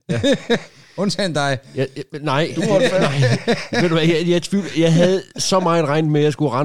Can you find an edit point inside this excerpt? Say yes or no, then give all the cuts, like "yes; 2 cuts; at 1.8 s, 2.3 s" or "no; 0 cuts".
no; 0 cuts